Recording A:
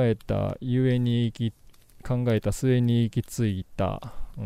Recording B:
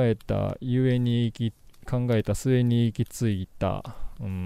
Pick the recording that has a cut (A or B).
B